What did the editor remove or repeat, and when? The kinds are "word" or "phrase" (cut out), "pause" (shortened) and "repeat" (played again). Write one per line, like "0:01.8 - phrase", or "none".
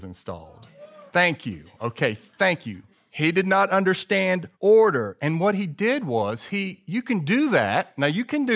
0:01.1 - pause
0:02.9 - pause
0:04.5 - pause